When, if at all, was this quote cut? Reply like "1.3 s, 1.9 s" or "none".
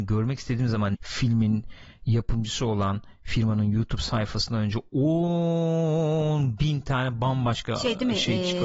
0.9 s